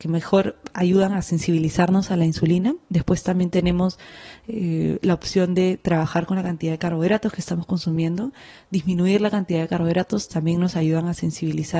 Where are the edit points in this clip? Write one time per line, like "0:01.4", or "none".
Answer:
none